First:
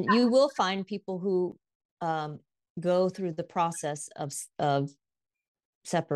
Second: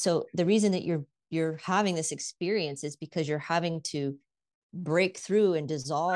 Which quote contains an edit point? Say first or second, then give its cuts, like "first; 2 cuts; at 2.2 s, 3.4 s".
first; 1 cut; at 1.7 s